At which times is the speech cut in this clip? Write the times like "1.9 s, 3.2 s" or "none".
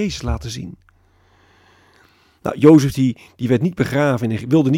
none